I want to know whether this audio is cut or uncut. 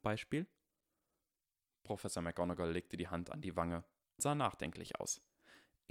cut